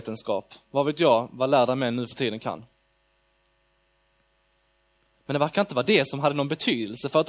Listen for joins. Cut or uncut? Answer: uncut